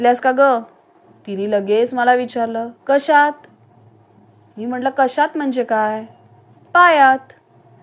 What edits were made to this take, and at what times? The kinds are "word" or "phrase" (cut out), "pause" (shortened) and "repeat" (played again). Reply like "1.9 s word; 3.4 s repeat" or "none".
none